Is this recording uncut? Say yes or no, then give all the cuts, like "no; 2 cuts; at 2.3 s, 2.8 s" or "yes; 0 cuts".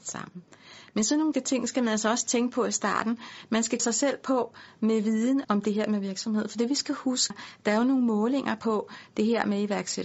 no; 4 cuts; at 1.3 s, 3.8 s, 5.4 s, 7.3 s